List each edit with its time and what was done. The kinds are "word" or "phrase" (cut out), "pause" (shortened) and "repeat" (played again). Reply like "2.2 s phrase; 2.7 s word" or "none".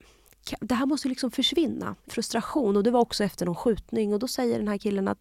2.1 s word